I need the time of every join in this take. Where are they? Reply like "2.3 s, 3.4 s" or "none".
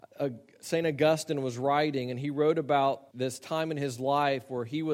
3.1 s